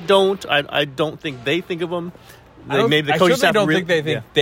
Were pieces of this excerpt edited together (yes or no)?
no